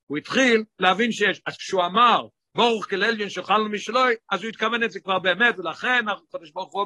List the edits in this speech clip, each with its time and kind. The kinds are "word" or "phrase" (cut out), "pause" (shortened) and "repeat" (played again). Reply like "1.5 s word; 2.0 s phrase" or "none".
none